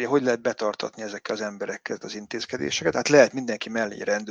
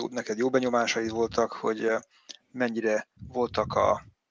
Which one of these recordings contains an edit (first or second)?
second